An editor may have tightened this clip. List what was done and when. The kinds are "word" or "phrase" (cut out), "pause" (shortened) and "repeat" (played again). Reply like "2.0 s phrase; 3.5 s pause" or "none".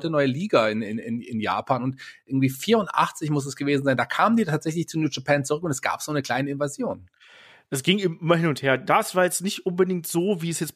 none